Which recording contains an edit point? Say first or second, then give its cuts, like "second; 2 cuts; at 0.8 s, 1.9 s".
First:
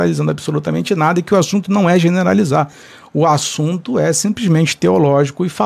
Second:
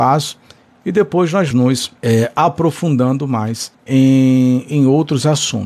second; 3 cuts; at 1.5 s, 2.0 s, 3.7 s